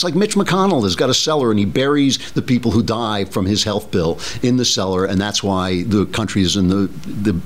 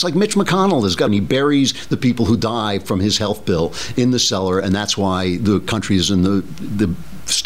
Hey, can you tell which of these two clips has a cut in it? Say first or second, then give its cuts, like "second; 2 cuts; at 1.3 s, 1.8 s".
second; 1 cut; at 1.1 s